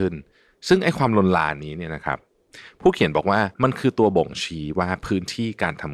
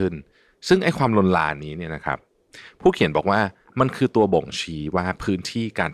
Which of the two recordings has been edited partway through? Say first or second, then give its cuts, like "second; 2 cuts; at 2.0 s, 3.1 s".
first; 1 cut; at 3.5 s